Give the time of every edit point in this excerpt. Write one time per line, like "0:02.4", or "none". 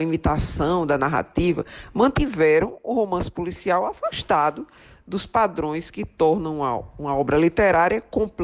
none